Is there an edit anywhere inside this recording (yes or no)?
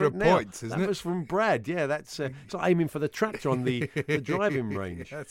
no